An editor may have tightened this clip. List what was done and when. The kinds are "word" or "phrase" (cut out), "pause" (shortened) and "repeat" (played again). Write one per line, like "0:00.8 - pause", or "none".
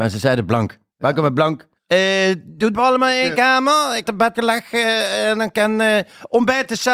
0:01.8 - pause
0:02.7 - phrase
0:04.0 - word
0:04.3 - phrase